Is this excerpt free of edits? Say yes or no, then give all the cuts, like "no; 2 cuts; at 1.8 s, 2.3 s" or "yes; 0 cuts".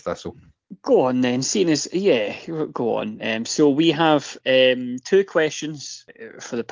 yes; 0 cuts